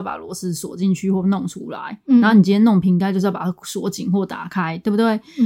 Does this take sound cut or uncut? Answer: uncut